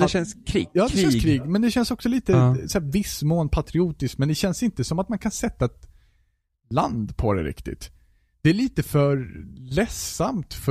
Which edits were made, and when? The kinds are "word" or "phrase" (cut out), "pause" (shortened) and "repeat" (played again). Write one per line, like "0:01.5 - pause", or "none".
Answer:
none